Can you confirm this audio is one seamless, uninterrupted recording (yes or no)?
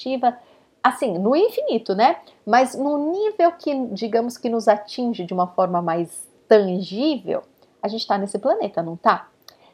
yes